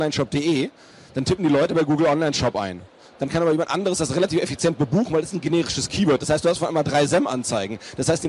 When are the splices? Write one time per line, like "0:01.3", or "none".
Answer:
none